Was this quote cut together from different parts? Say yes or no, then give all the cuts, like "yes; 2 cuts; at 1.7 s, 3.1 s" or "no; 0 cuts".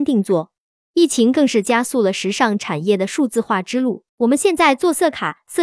yes; 1 cut; at 4.1 s